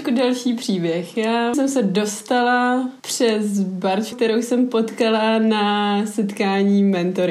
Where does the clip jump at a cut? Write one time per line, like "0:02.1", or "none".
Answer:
0:01.5
0:03.0
0:04.1